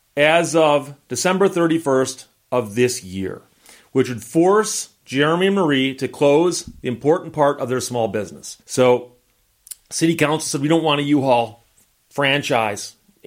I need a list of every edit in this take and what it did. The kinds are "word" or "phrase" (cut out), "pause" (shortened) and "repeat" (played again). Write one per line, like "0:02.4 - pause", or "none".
0:08.6 - pause